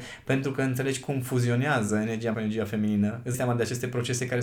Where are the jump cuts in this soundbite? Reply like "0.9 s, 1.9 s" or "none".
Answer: 2.3 s, 3.3 s